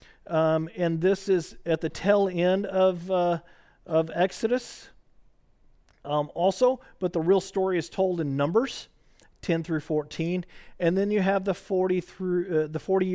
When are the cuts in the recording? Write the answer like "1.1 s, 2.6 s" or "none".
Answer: none